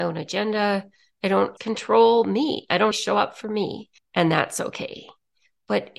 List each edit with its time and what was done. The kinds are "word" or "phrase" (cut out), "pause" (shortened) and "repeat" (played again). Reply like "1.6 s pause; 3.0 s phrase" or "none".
1.6 s word; 2.9 s word; 4.0 s pause